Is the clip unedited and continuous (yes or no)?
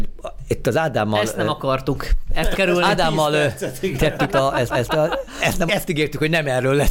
no